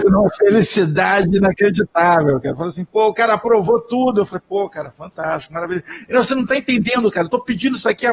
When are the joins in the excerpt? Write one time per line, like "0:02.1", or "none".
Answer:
none